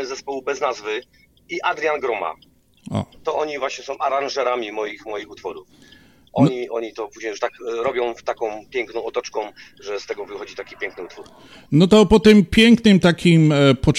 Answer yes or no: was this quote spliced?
no